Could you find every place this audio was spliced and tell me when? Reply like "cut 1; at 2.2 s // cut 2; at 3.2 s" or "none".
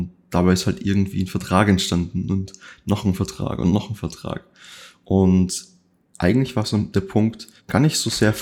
none